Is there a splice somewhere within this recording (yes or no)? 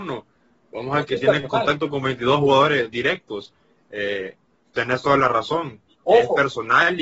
no